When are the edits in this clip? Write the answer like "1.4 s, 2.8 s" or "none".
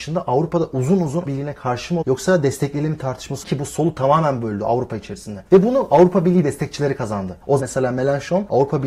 1.3 s, 2.0 s, 3.4 s, 5.5 s, 7.6 s